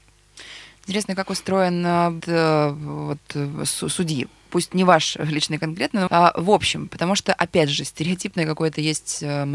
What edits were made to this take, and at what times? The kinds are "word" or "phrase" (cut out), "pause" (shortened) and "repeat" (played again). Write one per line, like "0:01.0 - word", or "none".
0:01.1 - word
0:02.2 - word
0:06.1 - word